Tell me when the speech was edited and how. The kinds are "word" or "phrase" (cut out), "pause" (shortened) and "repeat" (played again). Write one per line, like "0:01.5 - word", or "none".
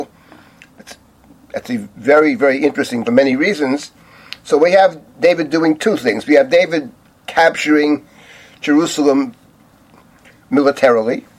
0:03.0 - phrase

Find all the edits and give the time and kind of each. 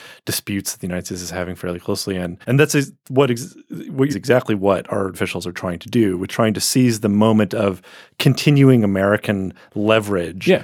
0:02.4 - pause
0:04.1 - phrase
0:05.1 - word
0:06.3 - phrase

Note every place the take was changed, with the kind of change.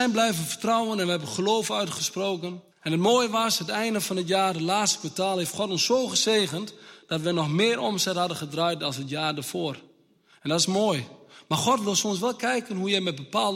0:02.7 - pause

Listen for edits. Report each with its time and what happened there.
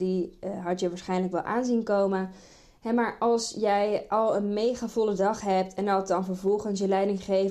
none

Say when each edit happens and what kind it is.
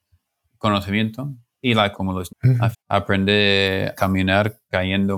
0:01.9 - word
0:02.3 - word
0:02.7 - word
0:04.0 - word

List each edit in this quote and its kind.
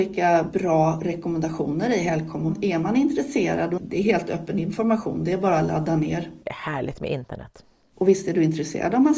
0:03.8 - phrase
0:06.4 - pause

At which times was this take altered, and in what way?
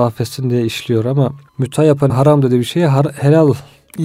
0:01.5 - pause
0:02.1 - phrase

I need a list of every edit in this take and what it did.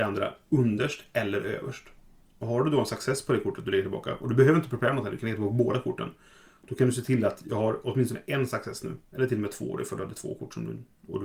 none

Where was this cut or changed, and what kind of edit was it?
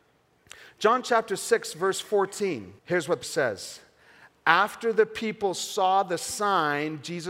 0:02.8 - pause
0:03.2 - word

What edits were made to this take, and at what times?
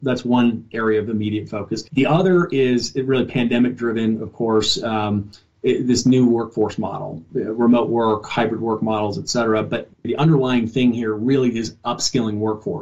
0:01.9 - pause

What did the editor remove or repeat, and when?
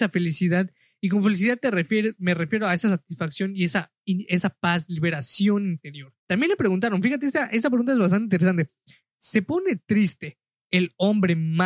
0:04.0 - pause
0:06.2 - pause

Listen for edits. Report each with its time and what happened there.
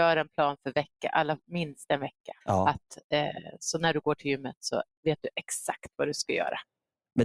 0:02.4 - pause

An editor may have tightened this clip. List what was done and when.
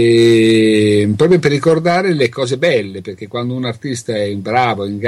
none

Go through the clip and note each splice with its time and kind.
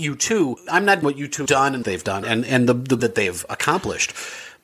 0:01.0 - word
0:01.5 - word
0:01.8 - phrase
0:02.2 - word
0:03.0 - word

